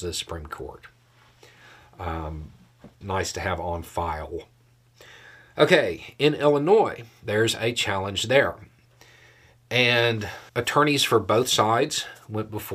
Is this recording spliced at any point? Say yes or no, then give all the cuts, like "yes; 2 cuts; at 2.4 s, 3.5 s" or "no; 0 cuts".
yes; 2 cuts; at 3.0 s, 10.5 s